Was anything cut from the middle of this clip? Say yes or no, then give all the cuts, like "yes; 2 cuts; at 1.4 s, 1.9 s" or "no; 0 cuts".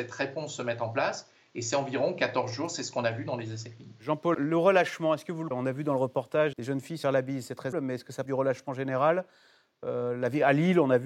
yes; 6 cuts; at 4.3 s, 5.5 s, 6.5 s, 7.0 s, 7.7 s, 8.2 s